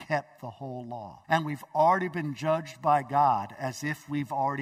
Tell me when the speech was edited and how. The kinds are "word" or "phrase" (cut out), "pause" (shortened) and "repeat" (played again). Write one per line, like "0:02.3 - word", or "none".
0:01.2 - pause